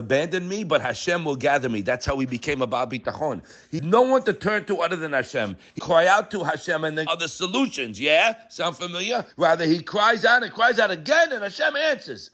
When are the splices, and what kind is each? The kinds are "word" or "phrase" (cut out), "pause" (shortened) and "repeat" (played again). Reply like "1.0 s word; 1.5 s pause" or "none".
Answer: 3.8 s word; 5.8 s word; 7.1 s phrase; 9.3 s pause